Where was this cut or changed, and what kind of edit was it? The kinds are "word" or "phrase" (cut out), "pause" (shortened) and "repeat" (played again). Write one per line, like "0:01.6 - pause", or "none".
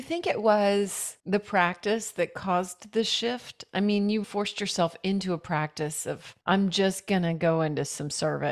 0:01.2 - pause
0:04.2 - word
0:06.4 - pause